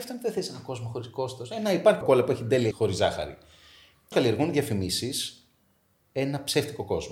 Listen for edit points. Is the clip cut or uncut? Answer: cut